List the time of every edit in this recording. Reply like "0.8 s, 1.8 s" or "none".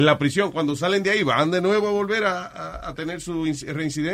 none

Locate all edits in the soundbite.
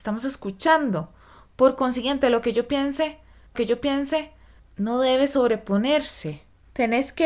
3.5 s

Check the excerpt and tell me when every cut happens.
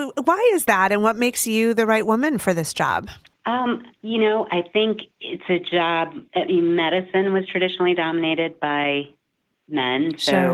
3.3 s, 5.1 s

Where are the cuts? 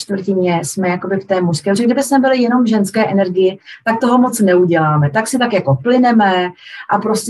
none

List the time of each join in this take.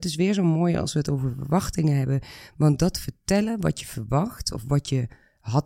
none

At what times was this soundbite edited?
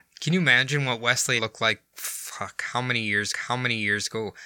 1.4 s, 3.3 s

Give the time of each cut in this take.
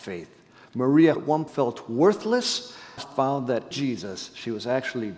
1.2 s, 1.5 s, 3.0 s, 3.7 s

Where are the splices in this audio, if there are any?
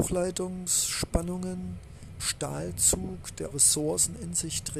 2.2 s, 3.5 s

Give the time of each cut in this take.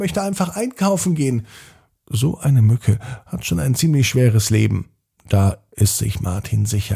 none

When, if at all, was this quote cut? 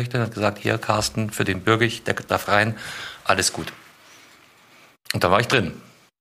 none

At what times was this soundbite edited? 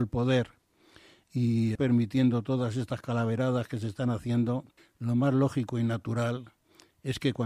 1.8 s, 4.8 s

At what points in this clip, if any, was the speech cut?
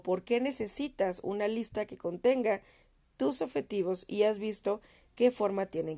none

